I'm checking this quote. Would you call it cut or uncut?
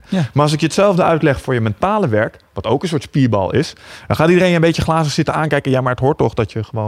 uncut